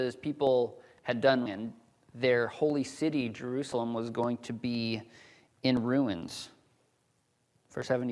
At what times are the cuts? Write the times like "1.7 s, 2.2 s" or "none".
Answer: 1.5 s